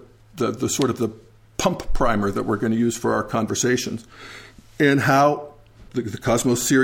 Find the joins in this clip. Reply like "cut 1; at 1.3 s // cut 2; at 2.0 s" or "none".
none